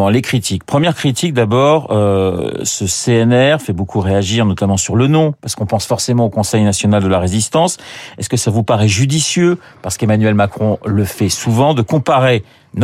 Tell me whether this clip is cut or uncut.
uncut